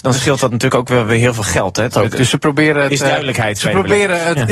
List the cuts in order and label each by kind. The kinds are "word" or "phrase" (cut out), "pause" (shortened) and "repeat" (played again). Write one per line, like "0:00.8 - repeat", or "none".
0:01.9 - word